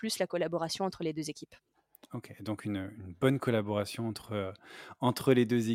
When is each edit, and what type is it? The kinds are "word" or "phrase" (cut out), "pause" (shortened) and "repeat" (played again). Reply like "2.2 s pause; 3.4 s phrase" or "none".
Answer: none